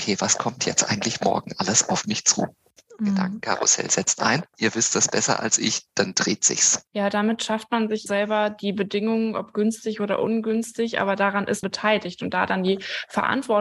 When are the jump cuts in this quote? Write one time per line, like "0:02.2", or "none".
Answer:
0:06.9
0:08.1
0:11.6